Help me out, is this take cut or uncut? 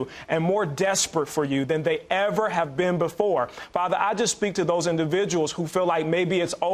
uncut